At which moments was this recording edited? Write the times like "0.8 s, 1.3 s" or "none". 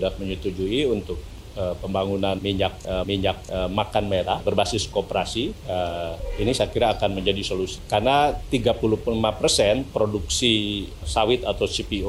3.0 s